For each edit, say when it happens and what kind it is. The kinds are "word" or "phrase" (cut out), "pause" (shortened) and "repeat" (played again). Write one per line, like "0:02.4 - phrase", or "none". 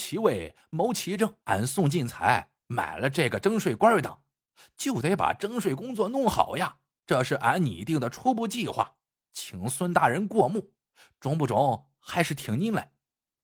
0:01.4 - pause
0:06.9 - pause